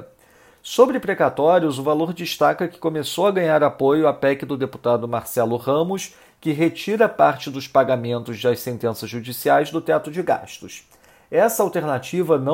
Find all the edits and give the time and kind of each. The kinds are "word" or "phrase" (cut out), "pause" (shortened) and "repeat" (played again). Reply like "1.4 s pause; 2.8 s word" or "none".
none